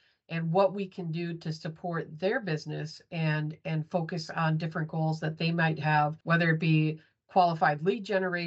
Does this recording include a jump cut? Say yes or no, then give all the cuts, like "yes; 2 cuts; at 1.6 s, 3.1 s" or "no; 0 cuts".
yes; 1 cut; at 6.2 s